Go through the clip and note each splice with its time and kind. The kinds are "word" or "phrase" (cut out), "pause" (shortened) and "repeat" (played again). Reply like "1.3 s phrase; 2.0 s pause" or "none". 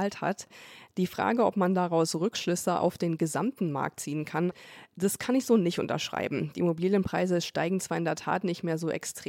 none